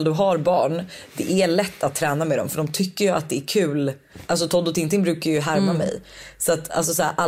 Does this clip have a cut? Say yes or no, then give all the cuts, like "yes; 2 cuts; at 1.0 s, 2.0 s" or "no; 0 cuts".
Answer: no; 0 cuts